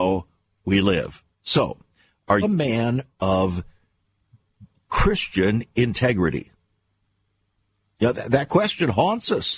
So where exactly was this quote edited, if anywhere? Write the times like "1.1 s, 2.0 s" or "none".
1.3 s, 2.4 s